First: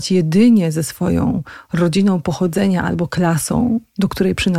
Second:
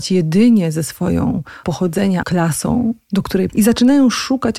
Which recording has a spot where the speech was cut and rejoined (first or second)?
second